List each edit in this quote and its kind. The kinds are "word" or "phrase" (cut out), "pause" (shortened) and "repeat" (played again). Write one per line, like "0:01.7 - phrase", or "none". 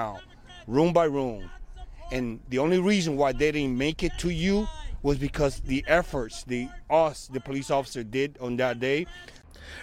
none